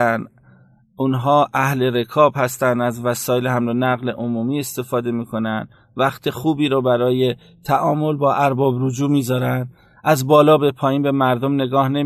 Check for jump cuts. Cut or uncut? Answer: uncut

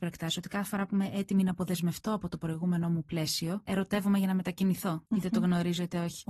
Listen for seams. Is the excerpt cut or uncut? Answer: uncut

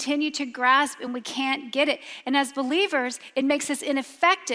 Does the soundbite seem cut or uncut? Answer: uncut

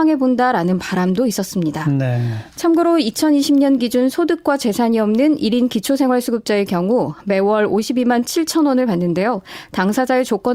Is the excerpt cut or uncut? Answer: uncut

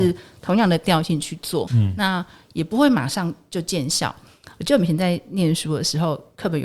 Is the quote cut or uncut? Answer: cut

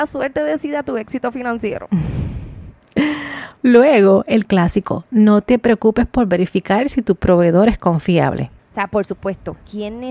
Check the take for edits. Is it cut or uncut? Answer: cut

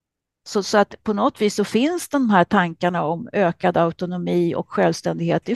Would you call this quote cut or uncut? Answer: uncut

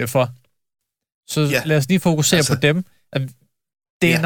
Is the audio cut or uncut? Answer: uncut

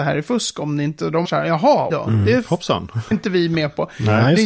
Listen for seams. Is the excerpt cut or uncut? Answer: cut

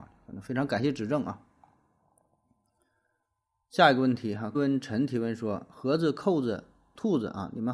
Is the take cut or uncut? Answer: cut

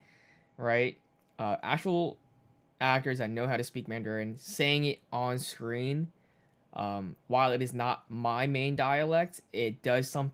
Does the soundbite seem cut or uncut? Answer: uncut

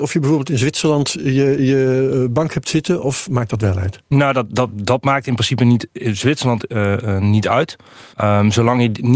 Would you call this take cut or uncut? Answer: cut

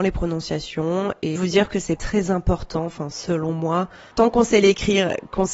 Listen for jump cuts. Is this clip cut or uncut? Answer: cut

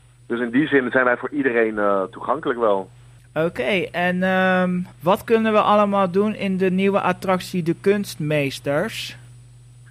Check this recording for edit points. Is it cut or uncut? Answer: cut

